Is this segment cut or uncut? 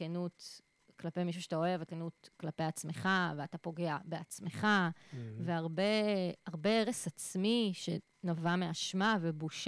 cut